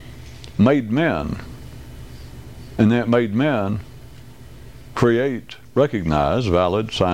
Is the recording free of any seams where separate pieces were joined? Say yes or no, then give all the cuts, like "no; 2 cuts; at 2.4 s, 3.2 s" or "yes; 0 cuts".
no; 1 cut; at 5.7 s